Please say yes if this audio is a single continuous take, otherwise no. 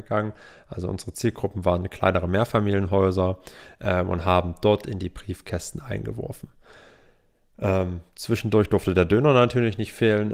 yes